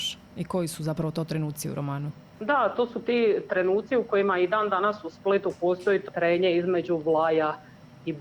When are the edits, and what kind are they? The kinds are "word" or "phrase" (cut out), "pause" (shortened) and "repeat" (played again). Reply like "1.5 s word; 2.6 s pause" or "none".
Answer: 2.3 s pause; 6.1 s word